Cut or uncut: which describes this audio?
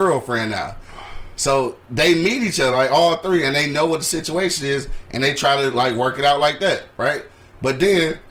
uncut